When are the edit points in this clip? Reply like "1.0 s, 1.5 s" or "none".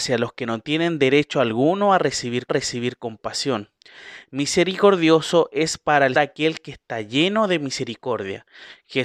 2.5 s, 6.1 s